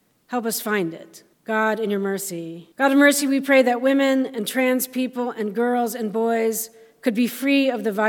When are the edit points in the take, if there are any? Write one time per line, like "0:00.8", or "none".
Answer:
0:01.3
0:02.7